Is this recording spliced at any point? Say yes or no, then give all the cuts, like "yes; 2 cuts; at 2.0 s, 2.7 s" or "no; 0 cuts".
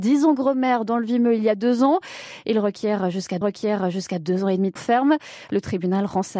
yes; 2 cuts; at 3.4 s, 4.8 s